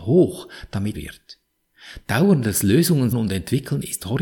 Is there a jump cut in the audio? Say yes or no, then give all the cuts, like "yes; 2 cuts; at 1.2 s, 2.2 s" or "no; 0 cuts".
yes; 2 cuts; at 0.9 s, 3.1 s